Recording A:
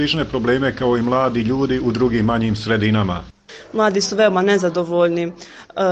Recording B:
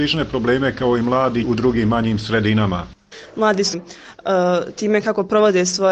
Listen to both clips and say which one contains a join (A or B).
B